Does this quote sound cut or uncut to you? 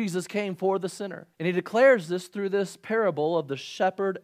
cut